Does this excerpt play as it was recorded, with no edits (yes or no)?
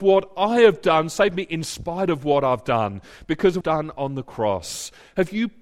no